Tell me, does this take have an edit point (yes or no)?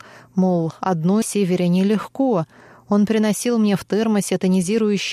yes